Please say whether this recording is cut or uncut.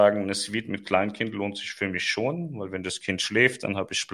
uncut